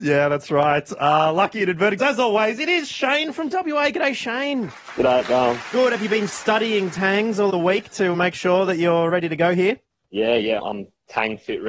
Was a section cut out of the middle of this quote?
yes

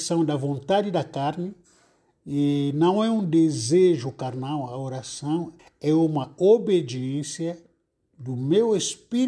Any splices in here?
yes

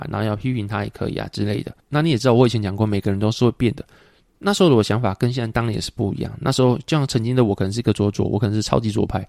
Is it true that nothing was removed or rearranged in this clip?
yes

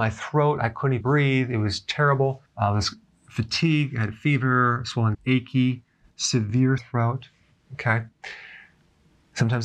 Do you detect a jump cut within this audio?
yes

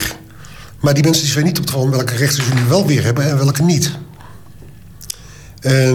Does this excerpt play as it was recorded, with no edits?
no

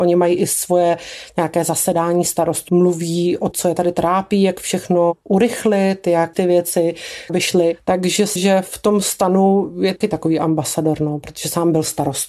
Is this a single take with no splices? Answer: no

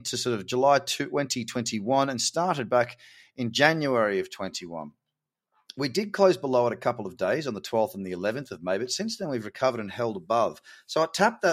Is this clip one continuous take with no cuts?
yes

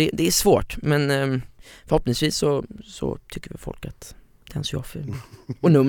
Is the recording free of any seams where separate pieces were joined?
yes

